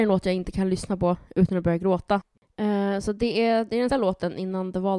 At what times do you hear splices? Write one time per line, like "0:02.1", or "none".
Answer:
0:03.9